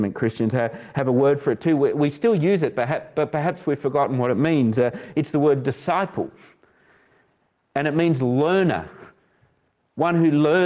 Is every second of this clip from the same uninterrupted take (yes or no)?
yes